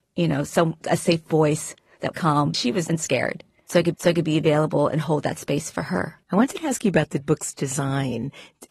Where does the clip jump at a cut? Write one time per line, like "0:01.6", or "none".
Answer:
0:02.1
0:02.5
0:02.9
0:03.9
0:06.2